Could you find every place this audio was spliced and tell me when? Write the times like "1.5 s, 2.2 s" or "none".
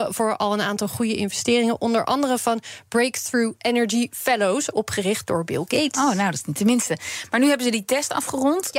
none